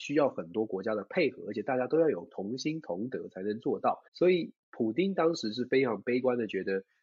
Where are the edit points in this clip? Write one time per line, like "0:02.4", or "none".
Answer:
0:04.1